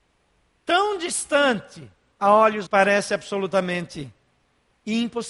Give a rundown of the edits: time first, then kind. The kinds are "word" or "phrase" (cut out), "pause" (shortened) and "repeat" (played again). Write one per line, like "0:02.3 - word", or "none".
0:02.7 - phrase